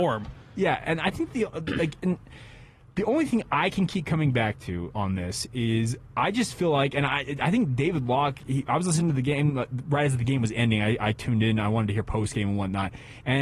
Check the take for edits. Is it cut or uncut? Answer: uncut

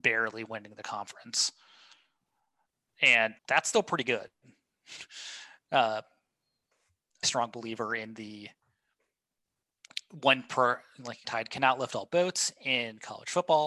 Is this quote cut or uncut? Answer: cut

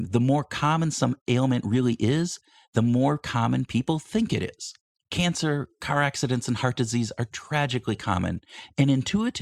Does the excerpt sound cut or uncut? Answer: uncut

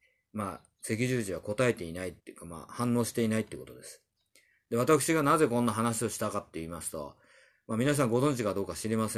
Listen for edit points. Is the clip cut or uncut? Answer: cut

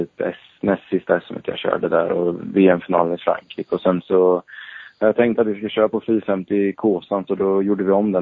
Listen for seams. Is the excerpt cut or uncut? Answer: uncut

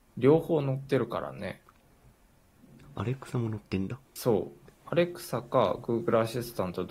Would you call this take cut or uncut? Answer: cut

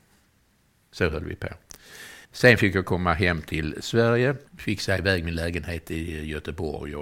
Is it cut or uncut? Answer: cut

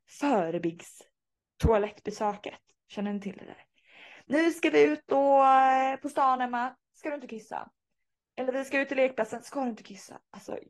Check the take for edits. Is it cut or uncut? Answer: uncut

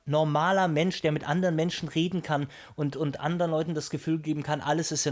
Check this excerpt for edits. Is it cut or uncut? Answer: uncut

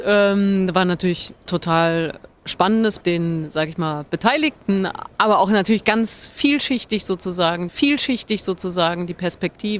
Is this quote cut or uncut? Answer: cut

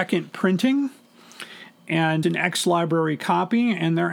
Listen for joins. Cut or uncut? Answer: cut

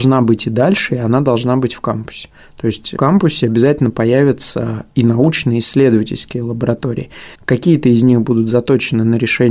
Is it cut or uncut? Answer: cut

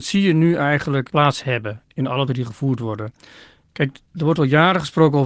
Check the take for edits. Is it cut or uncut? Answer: cut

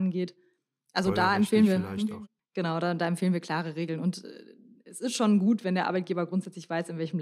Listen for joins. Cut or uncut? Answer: uncut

